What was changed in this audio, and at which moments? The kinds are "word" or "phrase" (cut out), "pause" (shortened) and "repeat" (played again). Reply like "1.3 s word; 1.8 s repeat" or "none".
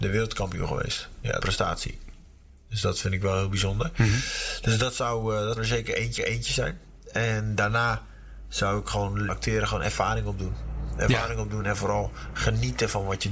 1.4 s phrase; 5.6 s word; 6.2 s repeat; 9.3 s phrase